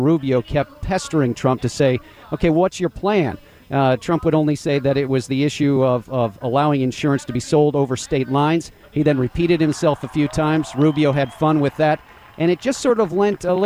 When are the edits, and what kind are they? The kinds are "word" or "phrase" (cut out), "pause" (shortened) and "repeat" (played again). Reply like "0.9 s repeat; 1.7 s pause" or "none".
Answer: none